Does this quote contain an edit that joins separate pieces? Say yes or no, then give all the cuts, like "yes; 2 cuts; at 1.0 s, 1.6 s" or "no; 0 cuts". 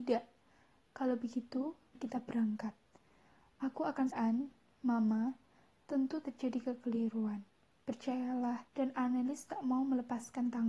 yes; 4 cuts; at 1.9 s, 4.1 s, 6.2 s, 8.7 s